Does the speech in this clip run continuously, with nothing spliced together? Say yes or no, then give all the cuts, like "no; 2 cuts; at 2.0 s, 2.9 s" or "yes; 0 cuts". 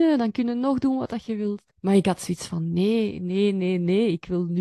no; 1 cut; at 1.7 s